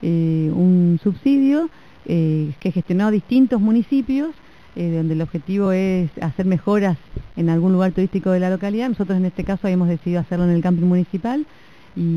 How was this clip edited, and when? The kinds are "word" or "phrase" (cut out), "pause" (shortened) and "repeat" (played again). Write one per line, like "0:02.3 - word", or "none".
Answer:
none